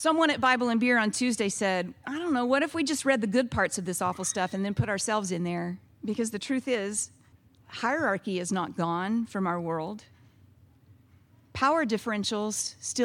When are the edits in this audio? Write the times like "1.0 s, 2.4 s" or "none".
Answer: 5.9 s, 7.3 s